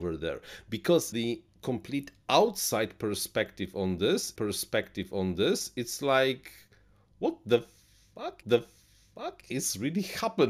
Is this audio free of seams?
no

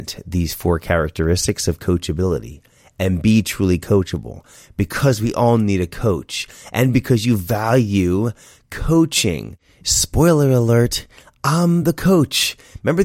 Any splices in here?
no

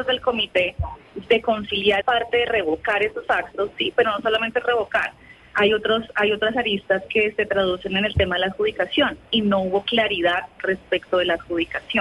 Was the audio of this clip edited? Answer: yes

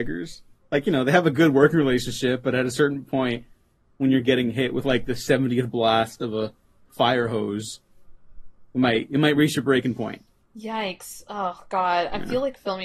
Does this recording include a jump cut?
no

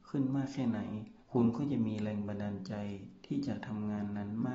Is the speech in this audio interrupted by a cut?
yes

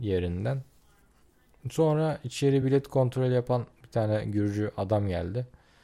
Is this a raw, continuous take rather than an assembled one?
yes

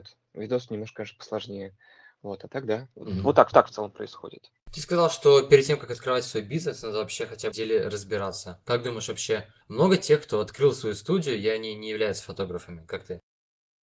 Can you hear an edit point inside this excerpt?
yes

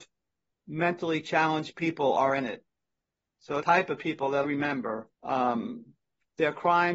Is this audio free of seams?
no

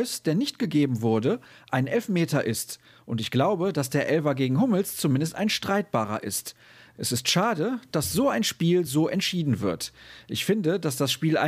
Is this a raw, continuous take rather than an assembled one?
yes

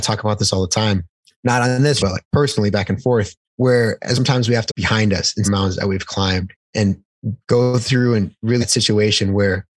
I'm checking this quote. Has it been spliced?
yes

